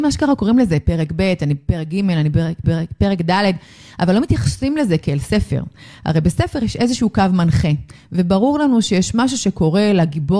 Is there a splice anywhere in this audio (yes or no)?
yes